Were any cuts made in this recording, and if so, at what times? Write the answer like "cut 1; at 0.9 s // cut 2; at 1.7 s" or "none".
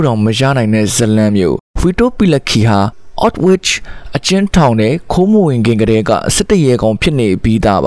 cut 1; at 1.7 s